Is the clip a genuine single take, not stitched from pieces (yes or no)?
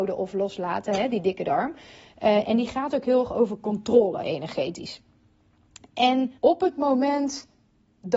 no